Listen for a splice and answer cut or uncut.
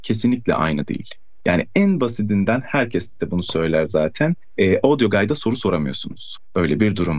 uncut